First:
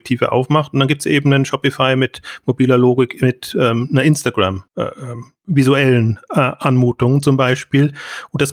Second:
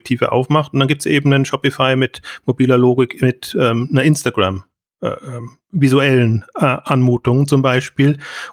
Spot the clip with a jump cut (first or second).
first